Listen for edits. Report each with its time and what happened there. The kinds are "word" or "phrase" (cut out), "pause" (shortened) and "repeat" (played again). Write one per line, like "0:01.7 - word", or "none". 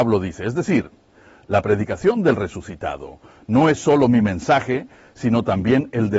none